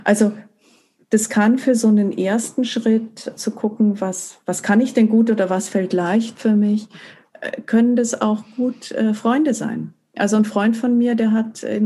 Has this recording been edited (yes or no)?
yes